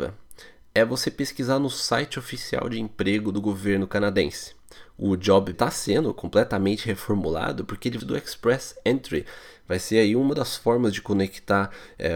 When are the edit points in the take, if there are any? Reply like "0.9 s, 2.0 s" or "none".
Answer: 5.5 s, 8.0 s